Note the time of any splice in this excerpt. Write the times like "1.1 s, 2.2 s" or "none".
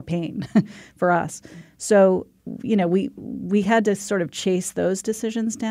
none